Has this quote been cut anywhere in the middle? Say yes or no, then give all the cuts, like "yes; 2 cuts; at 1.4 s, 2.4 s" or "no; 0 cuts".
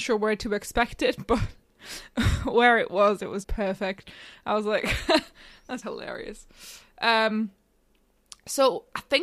yes; 2 cuts; at 3.4 s, 5.8 s